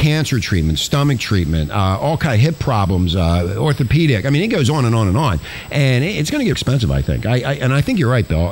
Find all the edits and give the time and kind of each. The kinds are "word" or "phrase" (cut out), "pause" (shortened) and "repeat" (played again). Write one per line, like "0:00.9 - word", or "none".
0:06.5 - word